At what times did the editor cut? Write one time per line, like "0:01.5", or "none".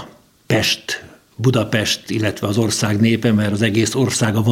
none